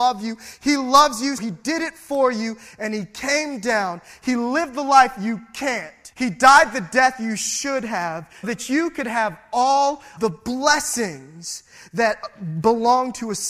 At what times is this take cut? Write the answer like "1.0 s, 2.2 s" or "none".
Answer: 1.4 s, 6.1 s, 8.4 s, 10.2 s